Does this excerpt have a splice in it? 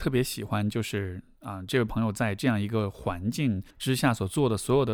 yes; 1 cut; at 3.7 s

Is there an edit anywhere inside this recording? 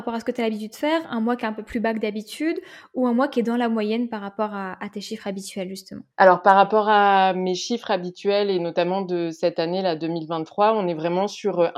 yes; 1 cut; at 6.1 s

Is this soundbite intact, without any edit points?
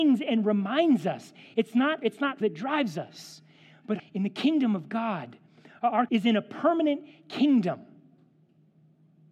no; 4 cuts; at 2.0 s, 2.4 s, 4.0 s, 6.1 s

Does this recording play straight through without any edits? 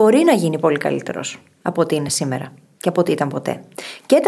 yes; 0 cuts

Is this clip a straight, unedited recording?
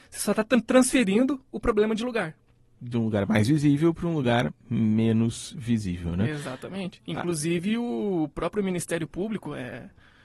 yes; 0 cuts

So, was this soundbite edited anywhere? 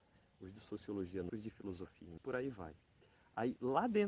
yes; 2 cuts; at 1.3 s, 2.2 s

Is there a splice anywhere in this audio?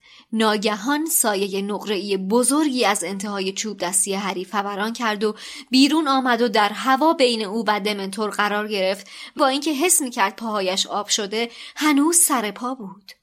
yes; 1 cut; at 9.4 s

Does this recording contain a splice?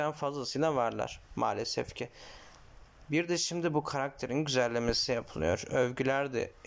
no; 0 cuts

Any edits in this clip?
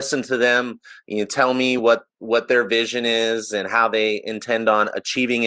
no; 0 cuts

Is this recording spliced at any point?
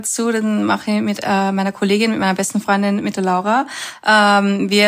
no; 0 cuts

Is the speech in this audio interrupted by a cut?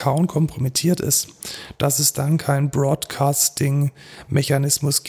no; 0 cuts

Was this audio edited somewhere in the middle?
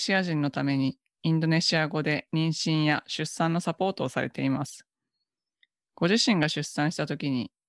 no; 0 cuts

